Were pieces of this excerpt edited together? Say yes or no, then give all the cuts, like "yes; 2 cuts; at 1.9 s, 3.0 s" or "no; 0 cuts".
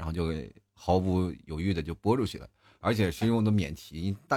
no; 0 cuts